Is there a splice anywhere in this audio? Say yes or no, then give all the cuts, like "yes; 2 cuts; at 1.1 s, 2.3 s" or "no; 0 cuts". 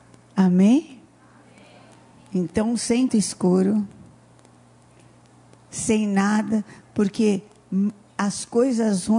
yes; 1 cut; at 3.1 s